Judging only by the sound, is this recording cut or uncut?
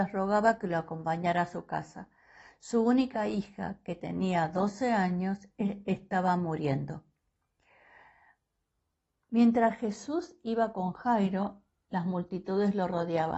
uncut